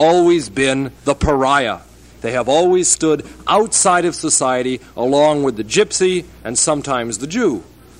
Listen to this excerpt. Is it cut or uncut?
cut